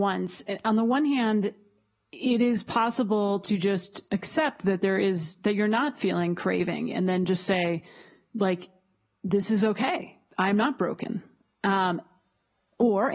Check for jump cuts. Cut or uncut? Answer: uncut